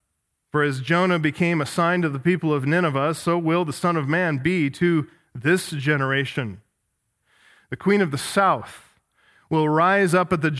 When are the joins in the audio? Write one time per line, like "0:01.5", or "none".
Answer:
none